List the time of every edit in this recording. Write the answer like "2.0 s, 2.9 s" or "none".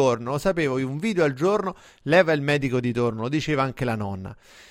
none